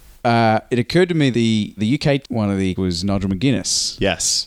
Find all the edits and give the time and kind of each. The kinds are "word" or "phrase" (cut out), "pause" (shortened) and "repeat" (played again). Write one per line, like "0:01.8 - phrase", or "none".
0:01.3 - word
0:01.8 - word
0:02.2 - word
0:02.8 - word